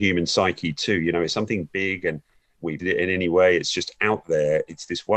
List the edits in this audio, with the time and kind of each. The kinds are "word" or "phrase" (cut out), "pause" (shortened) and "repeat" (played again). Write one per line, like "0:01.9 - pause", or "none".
0:02.8 - phrase